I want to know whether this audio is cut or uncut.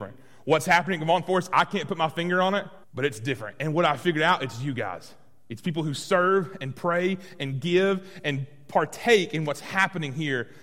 cut